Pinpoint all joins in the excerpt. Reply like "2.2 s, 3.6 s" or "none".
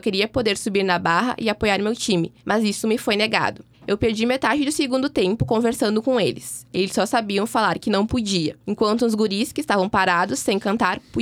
2.4 s, 3.7 s, 8.6 s